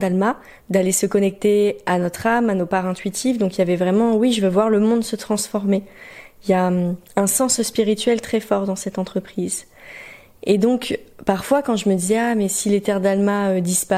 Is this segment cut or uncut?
uncut